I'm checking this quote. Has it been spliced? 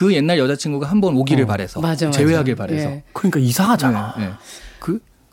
no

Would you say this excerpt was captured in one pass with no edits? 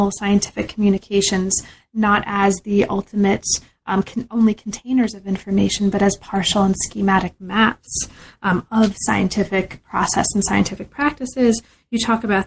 yes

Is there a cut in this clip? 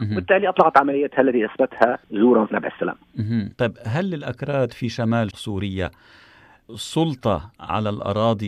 yes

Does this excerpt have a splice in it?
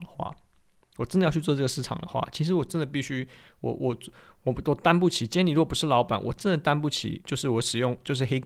no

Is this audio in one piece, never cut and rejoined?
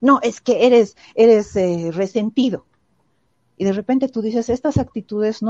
yes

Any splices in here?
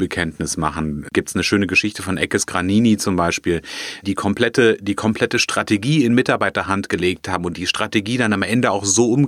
yes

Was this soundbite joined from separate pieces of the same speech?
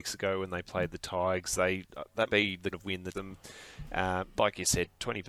yes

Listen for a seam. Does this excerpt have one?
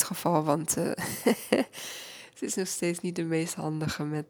no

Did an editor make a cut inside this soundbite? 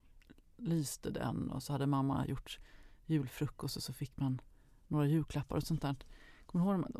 no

